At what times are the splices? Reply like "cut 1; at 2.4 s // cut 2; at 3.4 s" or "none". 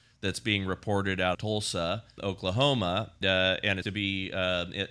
cut 1; at 1.3 s // cut 2; at 2.2 s // cut 3; at 3.2 s // cut 4; at 3.8 s